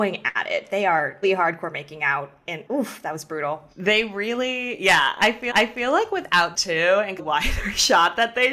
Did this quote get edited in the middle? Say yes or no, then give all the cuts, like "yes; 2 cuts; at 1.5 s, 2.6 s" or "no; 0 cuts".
yes; 6 cuts; at 1.2 s, 2.7 s, 3.7 s, 5.5 s, 6.5 s, 7.2 s